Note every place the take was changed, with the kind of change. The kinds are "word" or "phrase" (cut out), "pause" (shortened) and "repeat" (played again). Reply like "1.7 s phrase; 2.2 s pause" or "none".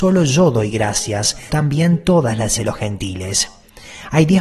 1.5 s word; 2.6 s word